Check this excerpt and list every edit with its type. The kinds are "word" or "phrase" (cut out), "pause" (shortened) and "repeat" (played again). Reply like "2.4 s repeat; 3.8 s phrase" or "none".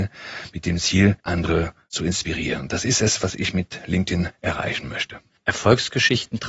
1.2 s pause; 4.3 s pause; 5.4 s pause